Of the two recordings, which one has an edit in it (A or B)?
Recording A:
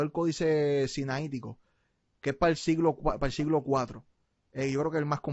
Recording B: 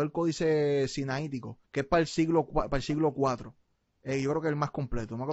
B